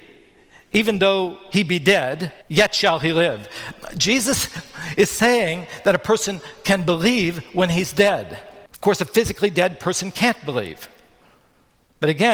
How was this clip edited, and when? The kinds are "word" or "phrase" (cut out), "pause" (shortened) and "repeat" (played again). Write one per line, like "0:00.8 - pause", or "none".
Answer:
0:02.4 - pause
0:08.7 - pause